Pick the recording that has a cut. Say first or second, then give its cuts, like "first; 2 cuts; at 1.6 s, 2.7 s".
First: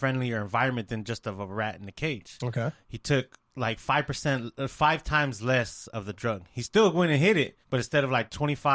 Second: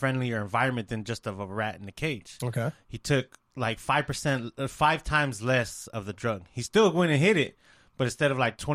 first; 1 cut; at 7.6 s